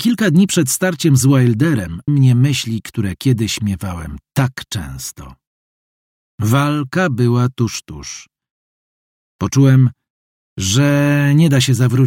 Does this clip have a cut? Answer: yes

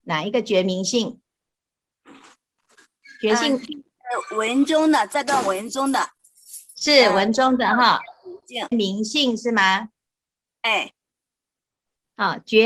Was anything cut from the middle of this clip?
yes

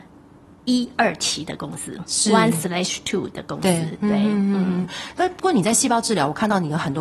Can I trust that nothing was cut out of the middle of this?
yes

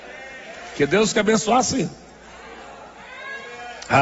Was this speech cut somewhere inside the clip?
yes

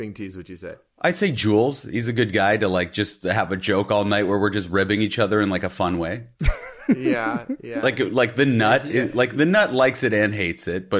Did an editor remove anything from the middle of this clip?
no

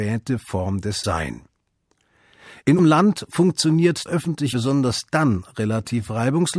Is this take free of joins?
no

